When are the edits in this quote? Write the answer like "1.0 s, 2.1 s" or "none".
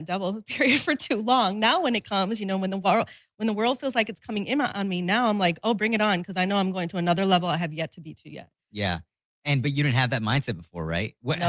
none

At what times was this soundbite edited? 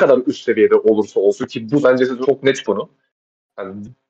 1.8 s, 2.2 s, 2.6 s

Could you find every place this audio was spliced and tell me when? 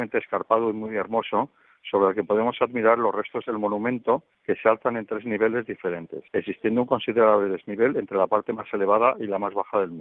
4.3 s, 6.3 s

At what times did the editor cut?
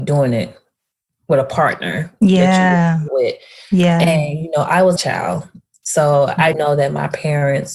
3.1 s, 5.0 s, 6.5 s

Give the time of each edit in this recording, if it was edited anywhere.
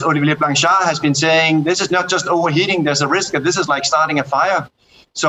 none

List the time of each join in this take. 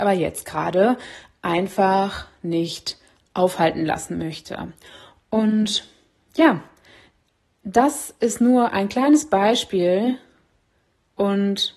none

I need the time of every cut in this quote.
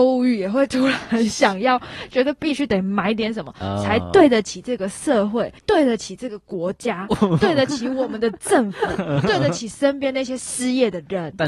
5.6 s

